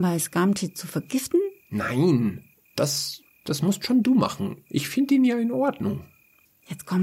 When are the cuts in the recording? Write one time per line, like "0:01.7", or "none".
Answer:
0:01.6

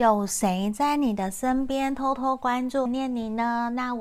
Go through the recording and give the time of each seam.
0:02.9

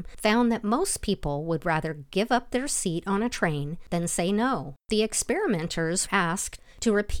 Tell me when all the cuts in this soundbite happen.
0:04.8
0:06.1

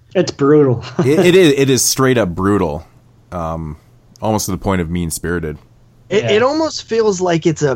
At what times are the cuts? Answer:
none

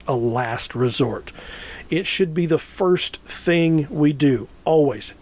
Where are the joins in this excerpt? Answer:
none

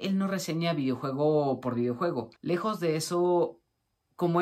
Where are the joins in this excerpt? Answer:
0:02.4

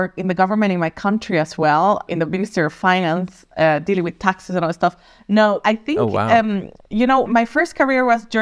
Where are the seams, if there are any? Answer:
0:02.1
0:05.6
0:06.9
0:07.3

